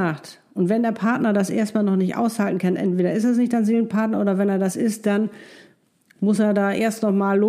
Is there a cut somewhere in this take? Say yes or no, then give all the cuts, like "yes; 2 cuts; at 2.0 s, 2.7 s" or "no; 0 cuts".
no; 0 cuts